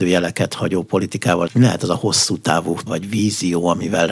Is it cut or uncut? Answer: cut